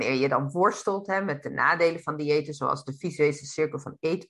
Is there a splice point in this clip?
no; 0 cuts

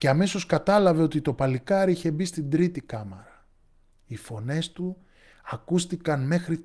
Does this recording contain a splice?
no; 0 cuts

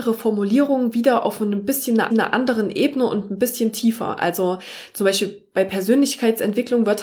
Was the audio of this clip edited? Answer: yes; 1 cut; at 2.1 s

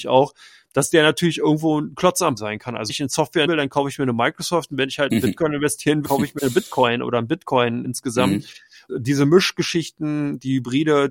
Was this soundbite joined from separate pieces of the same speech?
yes; 7 cuts; at 2.4 s, 2.9 s, 3.5 s, 6.0 s, 6.4 s, 7.8 s, 8.9 s

